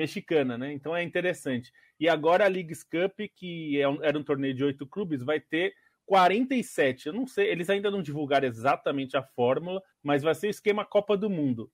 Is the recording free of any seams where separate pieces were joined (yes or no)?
no